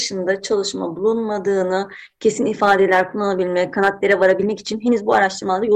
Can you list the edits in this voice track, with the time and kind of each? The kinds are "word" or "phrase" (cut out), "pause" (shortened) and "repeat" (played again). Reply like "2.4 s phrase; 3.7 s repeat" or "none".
none

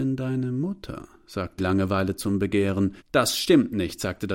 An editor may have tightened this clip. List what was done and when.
1.6 s word; 3.0 s pause

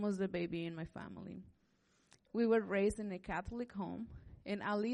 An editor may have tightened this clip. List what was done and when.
none

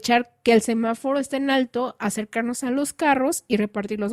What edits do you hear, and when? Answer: none

